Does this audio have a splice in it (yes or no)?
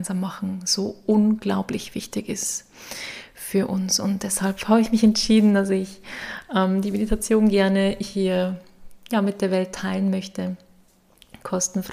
no